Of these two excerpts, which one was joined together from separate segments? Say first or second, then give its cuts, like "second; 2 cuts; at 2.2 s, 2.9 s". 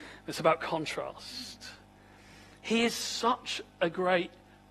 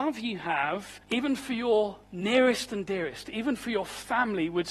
second; 2 cuts; at 1.0 s, 2.0 s